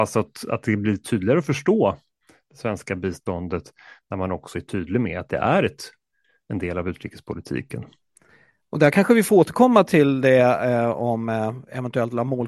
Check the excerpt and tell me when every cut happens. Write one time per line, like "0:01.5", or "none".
none